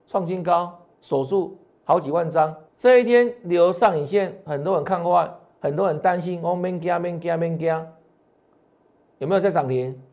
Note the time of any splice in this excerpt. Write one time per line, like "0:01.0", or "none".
0:00.9
0:02.7